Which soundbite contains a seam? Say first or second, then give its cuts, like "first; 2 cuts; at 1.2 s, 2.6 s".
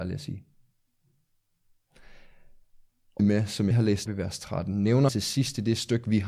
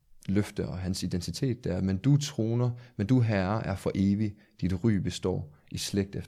first; 4 cuts; at 3.2 s, 3.7 s, 4.1 s, 5.1 s